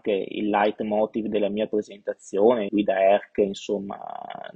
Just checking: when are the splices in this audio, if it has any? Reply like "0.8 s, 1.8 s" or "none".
2.7 s